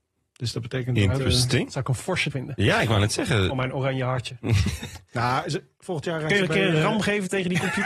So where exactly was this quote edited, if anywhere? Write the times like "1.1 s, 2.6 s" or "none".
2.3 s